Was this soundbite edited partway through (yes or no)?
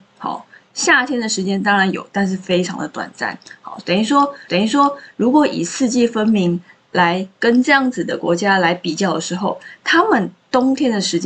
yes